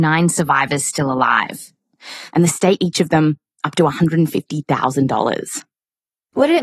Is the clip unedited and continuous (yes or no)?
no